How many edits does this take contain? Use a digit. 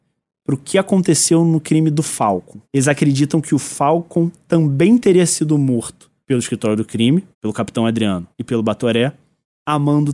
3